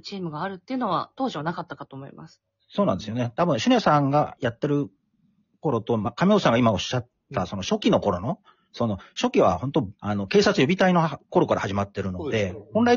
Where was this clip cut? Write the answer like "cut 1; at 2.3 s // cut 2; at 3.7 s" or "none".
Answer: cut 1; at 10.0 s